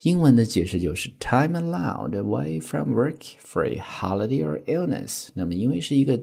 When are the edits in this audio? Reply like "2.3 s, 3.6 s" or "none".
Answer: none